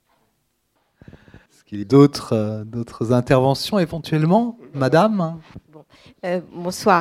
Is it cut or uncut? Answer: cut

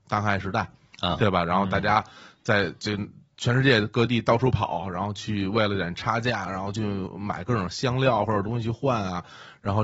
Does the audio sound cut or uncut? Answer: uncut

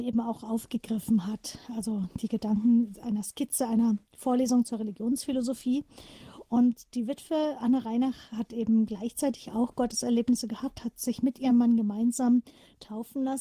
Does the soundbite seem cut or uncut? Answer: uncut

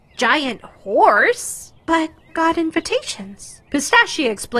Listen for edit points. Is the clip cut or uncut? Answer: cut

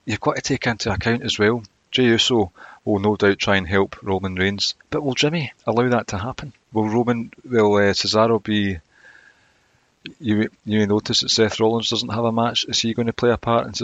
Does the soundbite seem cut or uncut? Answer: cut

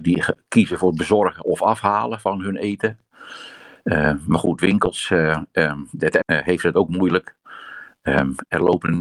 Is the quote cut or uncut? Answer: cut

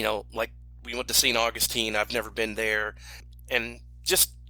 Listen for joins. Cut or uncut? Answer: uncut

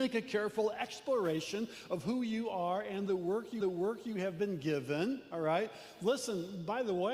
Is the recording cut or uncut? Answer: cut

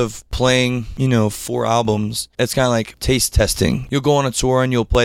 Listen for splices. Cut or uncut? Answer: cut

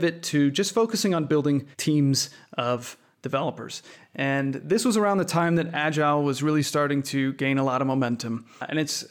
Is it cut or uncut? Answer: cut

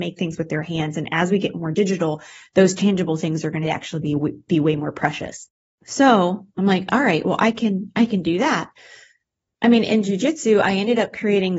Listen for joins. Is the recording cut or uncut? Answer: uncut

